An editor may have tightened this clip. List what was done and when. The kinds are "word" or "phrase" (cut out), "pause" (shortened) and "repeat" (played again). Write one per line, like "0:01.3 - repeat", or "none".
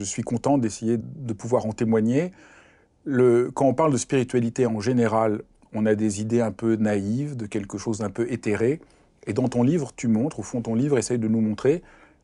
0:01.0 - word